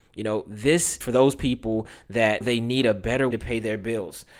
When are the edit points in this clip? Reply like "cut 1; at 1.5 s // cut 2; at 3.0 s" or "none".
cut 1; at 1.0 s // cut 2; at 2.4 s // cut 3; at 3.3 s